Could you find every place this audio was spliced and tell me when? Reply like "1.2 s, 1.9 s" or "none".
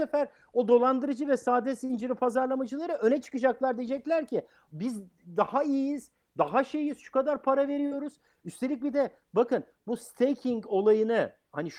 none